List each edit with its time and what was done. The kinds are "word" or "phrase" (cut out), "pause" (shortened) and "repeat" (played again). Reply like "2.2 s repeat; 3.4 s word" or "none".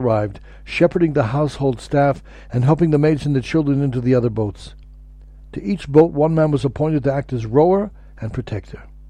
none